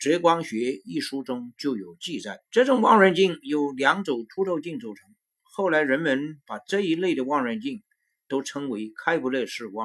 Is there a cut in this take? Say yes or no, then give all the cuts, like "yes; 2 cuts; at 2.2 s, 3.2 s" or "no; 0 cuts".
yes; 1 cut; at 2.5 s